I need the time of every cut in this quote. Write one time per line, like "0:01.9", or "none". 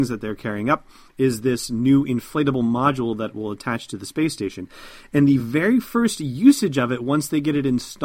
none

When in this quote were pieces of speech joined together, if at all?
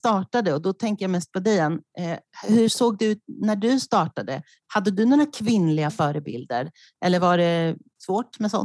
none

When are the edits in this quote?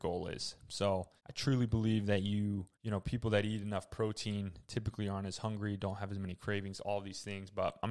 0:01.2
0:02.7

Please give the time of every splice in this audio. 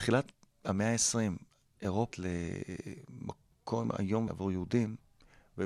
0:02.1
0:04.3

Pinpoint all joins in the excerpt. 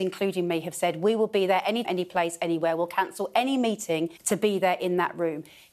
0:01.8
0:04.2

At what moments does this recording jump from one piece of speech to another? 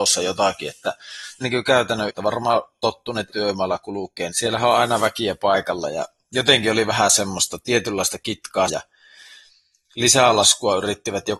0:01.4
0:02.1
0:03.3
0:04.3
0:08.7

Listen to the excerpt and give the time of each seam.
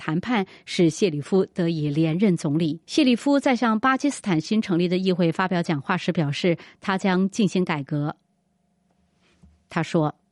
0:02.8

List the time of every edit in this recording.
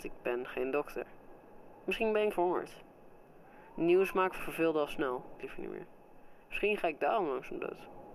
0:02.3
0:04.4
0:05.4
0:06.4

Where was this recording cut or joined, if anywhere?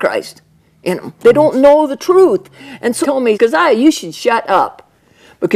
0:01.2
0:03.0
0:03.3

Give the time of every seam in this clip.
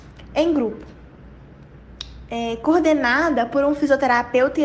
none

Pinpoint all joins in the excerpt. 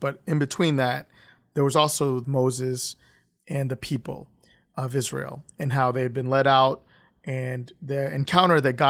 0:02.2

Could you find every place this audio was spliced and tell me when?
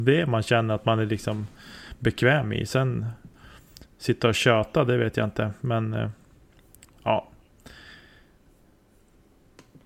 none

